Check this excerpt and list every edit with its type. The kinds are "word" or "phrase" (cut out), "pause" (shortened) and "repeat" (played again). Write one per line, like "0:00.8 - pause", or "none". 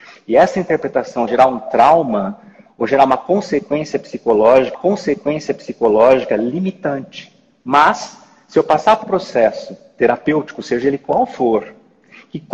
0:01.3 - word
0:04.7 - repeat
0:09.0 - word